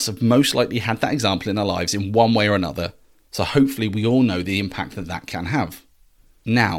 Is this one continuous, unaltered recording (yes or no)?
yes